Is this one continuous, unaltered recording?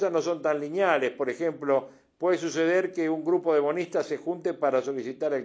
yes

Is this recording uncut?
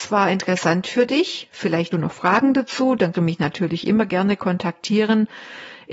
no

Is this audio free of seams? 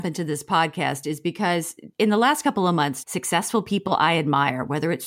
no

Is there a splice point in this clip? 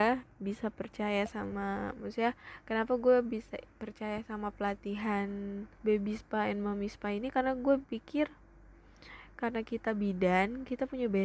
yes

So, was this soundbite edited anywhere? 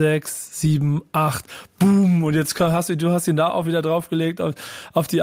no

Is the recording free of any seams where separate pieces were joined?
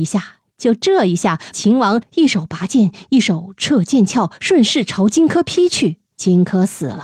no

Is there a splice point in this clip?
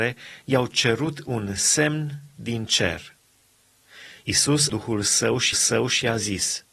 yes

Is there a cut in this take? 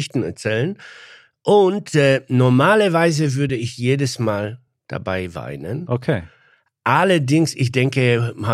no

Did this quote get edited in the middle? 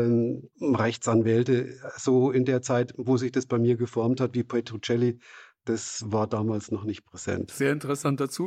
no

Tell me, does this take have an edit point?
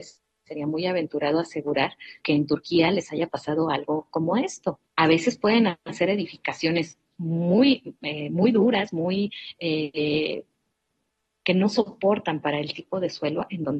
yes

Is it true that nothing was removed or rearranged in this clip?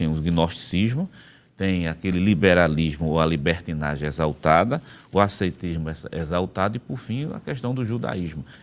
yes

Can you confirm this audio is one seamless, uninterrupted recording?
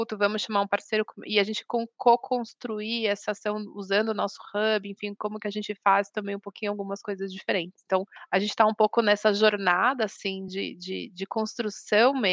yes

